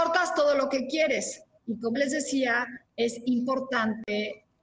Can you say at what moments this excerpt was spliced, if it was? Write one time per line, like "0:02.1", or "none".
0:01.6
0:01.9
0:02.9